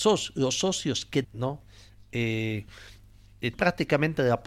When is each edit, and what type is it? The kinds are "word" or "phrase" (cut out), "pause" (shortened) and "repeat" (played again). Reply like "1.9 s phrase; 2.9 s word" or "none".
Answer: 1.2 s word; 3.5 s word